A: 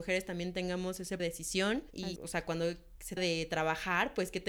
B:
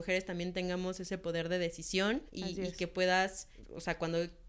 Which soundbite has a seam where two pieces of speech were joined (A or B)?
A